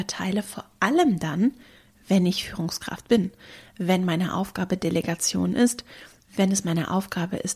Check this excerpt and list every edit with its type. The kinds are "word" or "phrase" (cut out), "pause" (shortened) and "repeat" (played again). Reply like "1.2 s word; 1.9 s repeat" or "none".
none